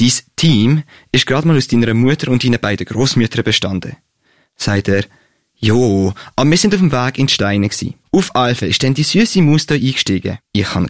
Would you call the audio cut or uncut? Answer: uncut